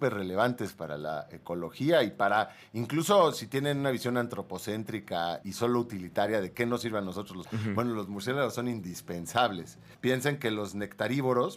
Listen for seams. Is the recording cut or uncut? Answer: cut